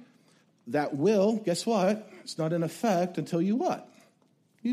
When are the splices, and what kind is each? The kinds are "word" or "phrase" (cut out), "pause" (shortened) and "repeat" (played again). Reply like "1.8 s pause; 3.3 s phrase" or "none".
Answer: none

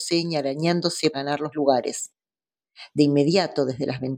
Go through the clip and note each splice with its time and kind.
1.1 s word; 1.5 s word

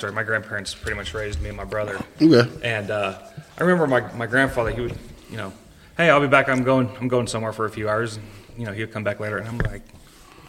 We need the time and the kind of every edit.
none

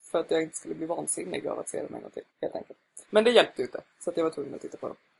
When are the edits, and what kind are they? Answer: 2.3 s pause; 3.0 s pause

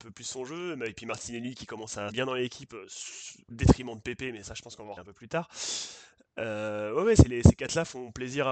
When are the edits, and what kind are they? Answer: 2.1 s word; 3.5 s word; 4.4 s word; 5.0 s word

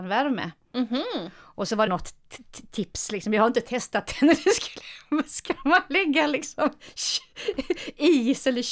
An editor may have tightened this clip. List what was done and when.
1.9 s phrase

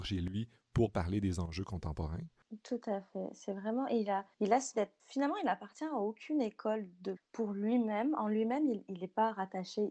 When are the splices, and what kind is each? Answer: 4.3 s pause; 4.7 s word; 7.2 s word

